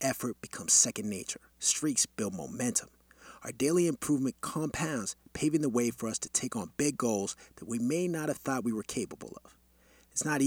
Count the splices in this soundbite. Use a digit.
1